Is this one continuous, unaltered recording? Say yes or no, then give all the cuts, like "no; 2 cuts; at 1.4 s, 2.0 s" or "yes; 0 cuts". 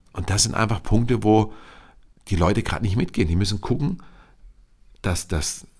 yes; 0 cuts